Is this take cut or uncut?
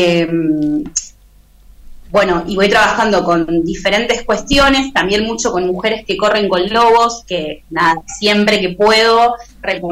uncut